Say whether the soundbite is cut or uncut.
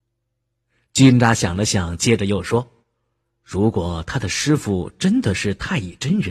cut